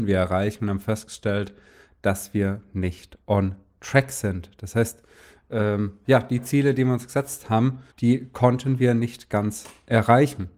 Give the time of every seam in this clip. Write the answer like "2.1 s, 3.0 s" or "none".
7.9 s